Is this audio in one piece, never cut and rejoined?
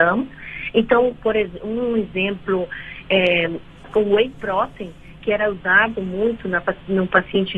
yes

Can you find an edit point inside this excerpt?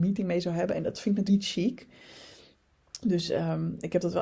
yes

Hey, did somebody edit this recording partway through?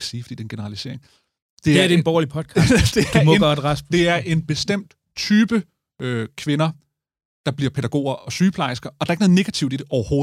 no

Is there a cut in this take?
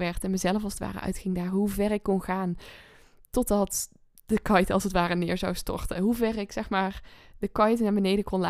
no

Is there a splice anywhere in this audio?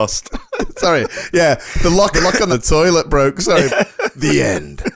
yes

